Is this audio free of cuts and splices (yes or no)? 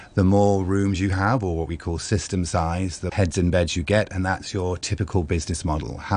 no